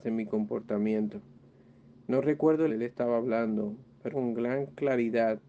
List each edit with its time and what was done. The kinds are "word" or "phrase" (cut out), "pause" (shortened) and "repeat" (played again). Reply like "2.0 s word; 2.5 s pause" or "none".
2.7 s phrase; 4.1 s word